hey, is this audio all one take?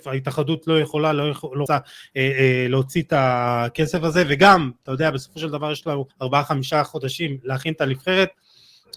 no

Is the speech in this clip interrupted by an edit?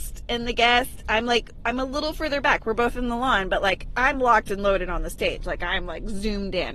no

